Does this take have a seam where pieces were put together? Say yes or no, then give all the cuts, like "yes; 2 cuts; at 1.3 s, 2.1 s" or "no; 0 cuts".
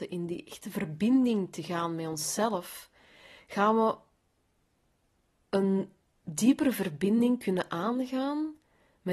no; 0 cuts